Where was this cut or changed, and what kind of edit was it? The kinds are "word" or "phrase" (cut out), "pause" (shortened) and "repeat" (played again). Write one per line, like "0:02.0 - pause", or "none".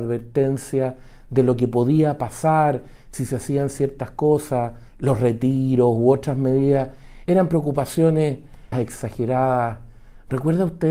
0:04.9 - pause
0:07.3 - word
0:08.7 - phrase